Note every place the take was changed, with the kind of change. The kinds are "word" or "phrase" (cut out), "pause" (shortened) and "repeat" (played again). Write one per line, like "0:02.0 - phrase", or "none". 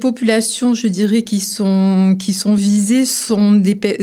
none